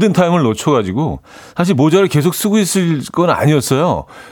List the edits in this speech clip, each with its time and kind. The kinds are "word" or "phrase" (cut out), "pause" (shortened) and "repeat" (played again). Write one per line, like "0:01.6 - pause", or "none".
none